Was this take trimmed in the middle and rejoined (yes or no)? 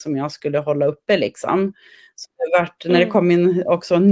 no